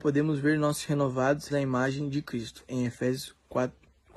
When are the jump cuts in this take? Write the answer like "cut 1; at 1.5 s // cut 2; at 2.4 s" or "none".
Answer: cut 1; at 1.5 s